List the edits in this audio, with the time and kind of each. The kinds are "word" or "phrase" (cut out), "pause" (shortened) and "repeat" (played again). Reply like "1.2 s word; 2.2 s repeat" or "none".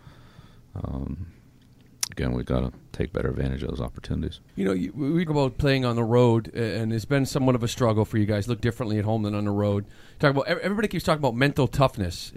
2.4 s word; 4.5 s pause; 5.3 s word